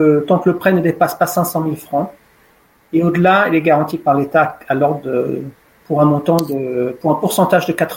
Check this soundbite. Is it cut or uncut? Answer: uncut